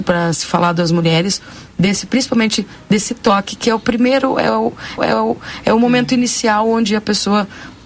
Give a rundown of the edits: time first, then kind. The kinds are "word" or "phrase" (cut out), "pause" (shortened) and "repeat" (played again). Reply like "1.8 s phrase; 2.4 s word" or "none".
5.0 s repeat